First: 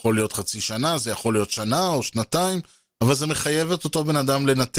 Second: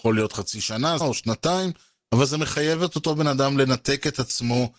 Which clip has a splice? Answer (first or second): second